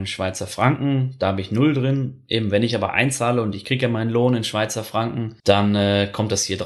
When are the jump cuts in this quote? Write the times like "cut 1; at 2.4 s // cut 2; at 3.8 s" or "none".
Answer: cut 1; at 5.4 s